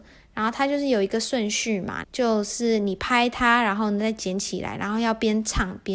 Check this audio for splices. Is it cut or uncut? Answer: cut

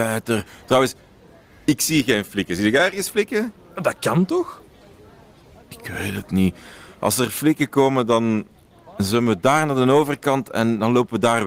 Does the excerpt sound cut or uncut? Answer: uncut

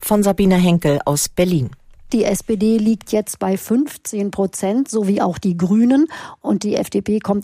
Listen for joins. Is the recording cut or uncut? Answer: uncut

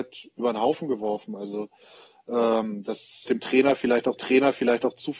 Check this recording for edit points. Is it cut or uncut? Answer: cut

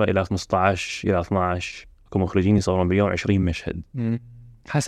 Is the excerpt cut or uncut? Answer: uncut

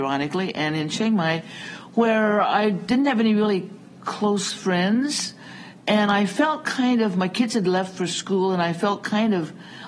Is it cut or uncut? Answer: uncut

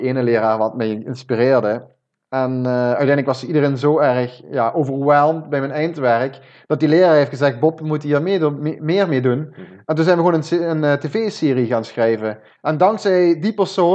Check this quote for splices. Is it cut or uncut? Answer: uncut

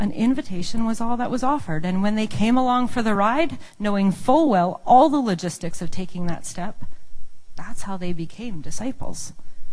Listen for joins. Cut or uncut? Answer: uncut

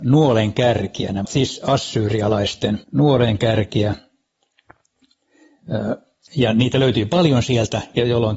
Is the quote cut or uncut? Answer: cut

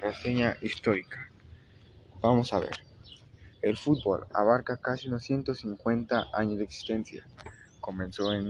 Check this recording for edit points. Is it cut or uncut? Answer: cut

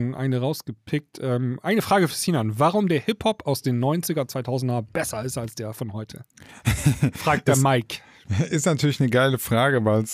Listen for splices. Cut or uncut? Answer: uncut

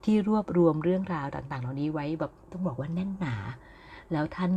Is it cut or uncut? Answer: cut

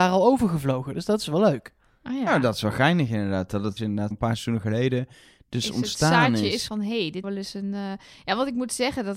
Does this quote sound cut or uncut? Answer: cut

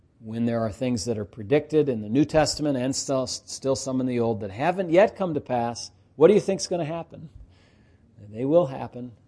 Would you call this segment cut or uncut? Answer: uncut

